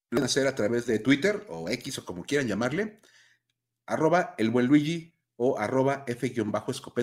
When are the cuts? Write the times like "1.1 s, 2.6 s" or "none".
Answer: none